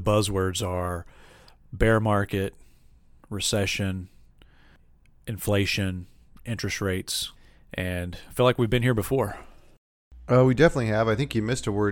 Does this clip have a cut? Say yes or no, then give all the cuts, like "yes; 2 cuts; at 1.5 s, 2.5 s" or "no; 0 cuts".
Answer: no; 0 cuts